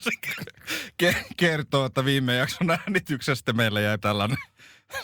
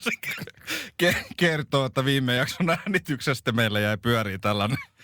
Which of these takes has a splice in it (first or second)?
first